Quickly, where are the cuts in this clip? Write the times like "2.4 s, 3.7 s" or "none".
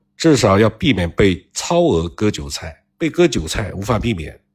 2.9 s